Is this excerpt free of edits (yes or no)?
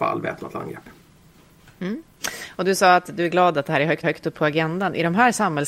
no